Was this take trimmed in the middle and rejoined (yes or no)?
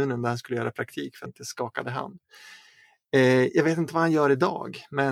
yes